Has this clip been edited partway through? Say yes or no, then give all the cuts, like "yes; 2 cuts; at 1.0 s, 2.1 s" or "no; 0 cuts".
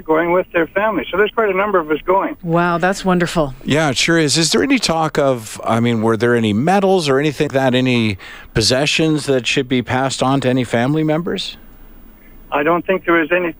yes; 1 cut; at 7.5 s